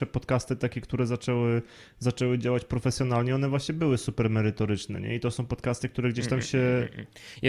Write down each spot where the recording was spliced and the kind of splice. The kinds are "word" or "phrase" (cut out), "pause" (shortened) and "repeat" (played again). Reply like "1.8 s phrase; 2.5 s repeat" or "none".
none